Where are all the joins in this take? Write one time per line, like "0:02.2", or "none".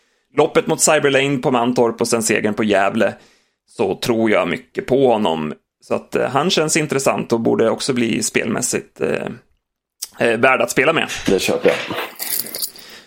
none